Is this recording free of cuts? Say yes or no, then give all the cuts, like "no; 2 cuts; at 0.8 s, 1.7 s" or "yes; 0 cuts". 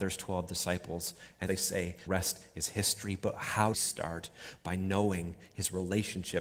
no; 3 cuts; at 1.5 s, 2.1 s, 3.7 s